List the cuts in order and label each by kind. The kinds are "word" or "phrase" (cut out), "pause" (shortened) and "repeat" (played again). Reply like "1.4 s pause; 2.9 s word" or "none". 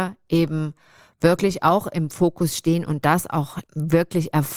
3.7 s pause